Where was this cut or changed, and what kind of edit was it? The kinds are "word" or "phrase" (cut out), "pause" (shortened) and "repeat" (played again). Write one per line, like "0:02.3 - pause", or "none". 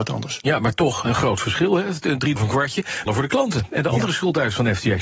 0:02.4 - word
0:03.1 - word